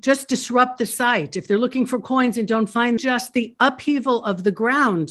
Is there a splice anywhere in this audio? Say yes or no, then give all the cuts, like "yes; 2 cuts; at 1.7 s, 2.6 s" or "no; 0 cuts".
yes; 1 cut; at 3.0 s